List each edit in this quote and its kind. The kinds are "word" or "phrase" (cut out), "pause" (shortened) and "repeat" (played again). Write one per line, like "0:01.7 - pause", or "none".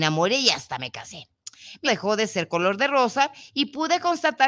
0:01.9 - word